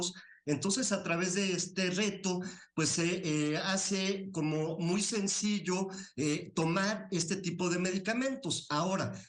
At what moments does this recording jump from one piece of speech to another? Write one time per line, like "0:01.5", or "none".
none